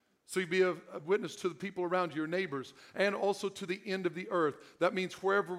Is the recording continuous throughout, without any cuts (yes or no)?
yes